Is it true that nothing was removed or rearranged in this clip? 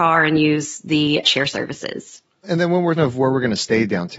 no; 3 cuts; at 1.2 s, 2.4 s, 3.0 s

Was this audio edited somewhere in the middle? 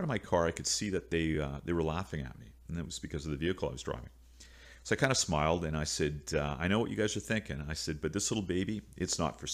no; 0 cuts

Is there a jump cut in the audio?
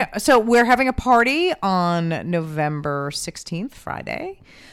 no; 0 cuts

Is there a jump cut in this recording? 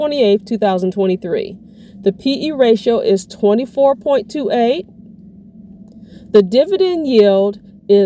no; 0 cuts

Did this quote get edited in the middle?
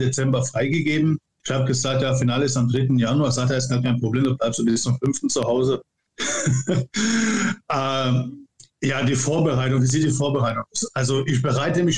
no; 0 cuts

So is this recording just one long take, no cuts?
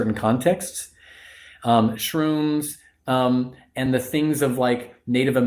yes; 0 cuts

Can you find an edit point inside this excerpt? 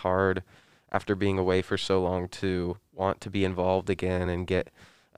no; 0 cuts

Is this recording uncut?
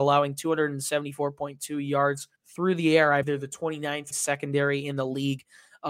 no; 3 cuts; at 2.4 s, 3.2 s, 4.1 s

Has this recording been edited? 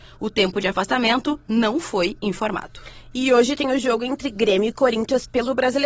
no; 0 cuts

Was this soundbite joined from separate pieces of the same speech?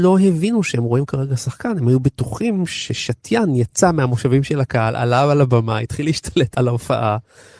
no; 0 cuts

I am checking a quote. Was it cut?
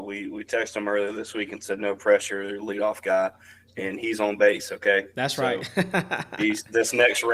no; 0 cuts

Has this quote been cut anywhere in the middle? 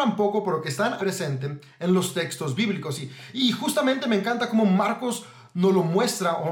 yes; 1 cut; at 1.0 s

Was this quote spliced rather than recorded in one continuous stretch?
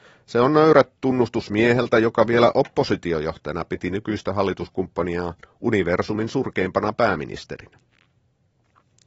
no; 0 cuts

